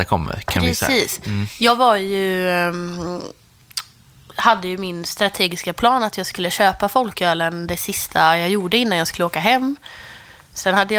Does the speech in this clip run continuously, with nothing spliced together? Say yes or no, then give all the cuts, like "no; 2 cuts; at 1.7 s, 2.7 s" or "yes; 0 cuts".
yes; 0 cuts